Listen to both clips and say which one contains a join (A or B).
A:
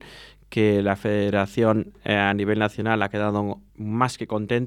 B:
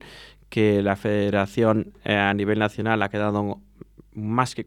A